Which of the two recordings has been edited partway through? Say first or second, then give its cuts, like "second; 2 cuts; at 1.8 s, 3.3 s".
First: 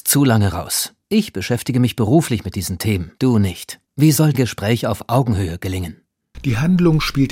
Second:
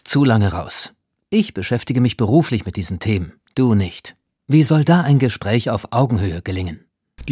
first; 4 cuts; at 1.0 s, 3.1 s, 3.8 s, 4.3 s